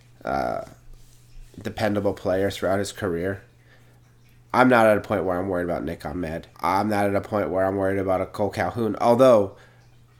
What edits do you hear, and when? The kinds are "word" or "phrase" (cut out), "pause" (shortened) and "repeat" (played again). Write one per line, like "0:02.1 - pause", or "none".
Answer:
0:06.5 - pause